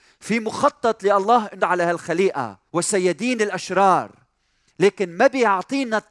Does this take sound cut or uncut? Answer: cut